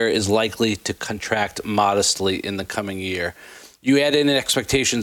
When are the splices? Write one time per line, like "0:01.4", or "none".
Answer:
none